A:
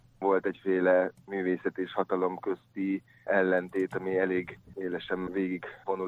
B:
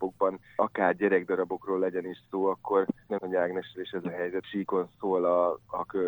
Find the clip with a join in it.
B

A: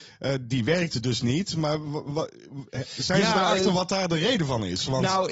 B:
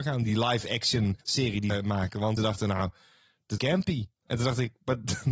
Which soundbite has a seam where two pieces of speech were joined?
B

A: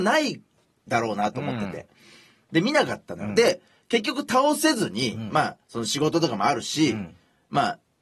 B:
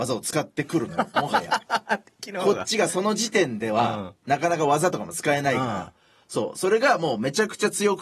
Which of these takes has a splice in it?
A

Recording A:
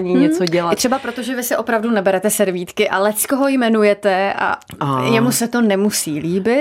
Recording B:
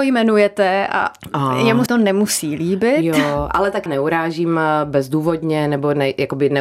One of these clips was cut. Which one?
B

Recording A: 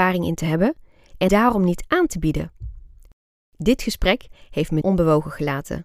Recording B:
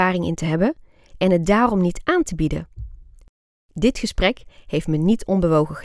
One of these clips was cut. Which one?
A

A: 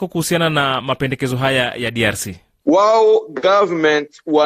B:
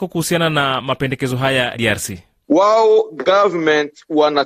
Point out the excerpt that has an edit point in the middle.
B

